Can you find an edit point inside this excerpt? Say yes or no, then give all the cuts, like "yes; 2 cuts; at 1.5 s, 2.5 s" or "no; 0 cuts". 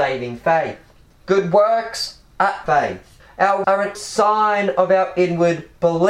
yes; 3 cuts; at 2.6 s, 3.6 s, 3.9 s